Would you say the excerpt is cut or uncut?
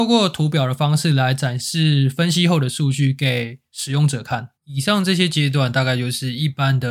cut